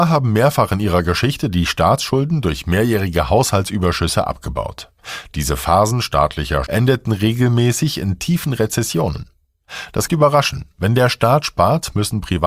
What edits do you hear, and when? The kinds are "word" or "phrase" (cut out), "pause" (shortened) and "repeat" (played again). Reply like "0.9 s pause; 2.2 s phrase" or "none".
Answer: 6.7 s word; 10.1 s phrase